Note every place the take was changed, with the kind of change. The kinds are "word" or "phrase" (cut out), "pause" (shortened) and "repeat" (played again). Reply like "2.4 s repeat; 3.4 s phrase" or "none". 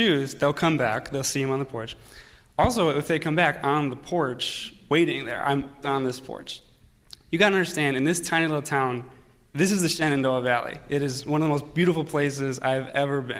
3.6 s phrase; 5.8 s word; 9.5 s phrase